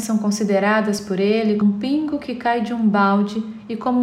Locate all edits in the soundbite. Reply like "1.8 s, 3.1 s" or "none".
1.6 s